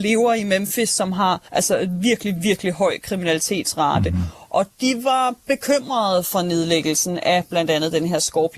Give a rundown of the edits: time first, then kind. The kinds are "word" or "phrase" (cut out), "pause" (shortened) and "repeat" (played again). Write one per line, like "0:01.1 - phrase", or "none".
0:01.5 - pause